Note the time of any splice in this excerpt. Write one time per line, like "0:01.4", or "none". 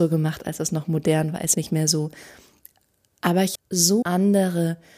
0:01.5
0:03.5
0:04.0

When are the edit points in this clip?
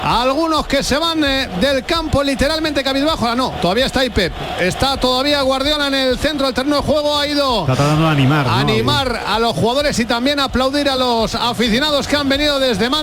none

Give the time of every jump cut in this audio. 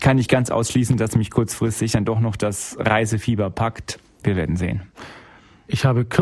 none

